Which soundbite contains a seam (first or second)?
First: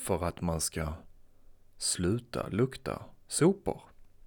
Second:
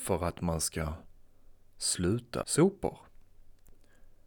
second